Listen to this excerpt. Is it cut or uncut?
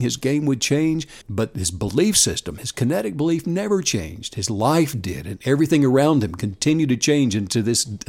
cut